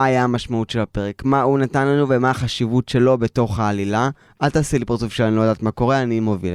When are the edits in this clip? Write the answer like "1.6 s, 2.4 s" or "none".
none